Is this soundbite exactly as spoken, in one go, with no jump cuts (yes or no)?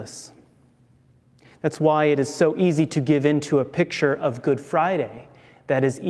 yes